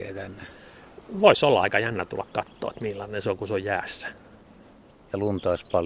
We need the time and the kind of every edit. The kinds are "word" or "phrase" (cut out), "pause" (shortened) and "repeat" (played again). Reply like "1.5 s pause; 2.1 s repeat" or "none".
none

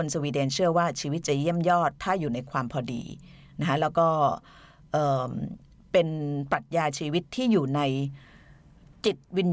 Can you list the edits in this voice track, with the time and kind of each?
none

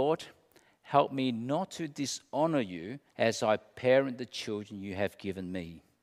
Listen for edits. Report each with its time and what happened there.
3.1 s pause

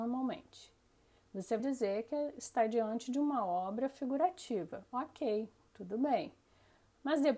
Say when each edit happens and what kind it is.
1.6 s word

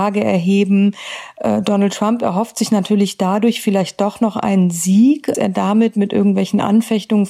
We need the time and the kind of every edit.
5.3 s phrase

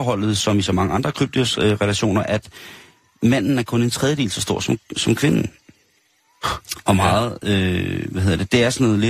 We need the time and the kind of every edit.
2.2 s word

